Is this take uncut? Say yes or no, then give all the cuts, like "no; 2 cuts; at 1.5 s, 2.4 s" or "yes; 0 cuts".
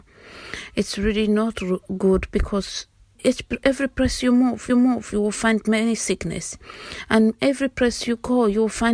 no; 2 cuts; at 3.1 s, 4.7 s